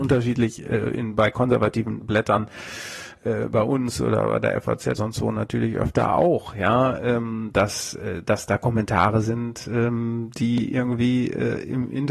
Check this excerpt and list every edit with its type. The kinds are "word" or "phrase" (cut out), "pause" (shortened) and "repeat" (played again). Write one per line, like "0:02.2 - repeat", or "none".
0:05.0 - word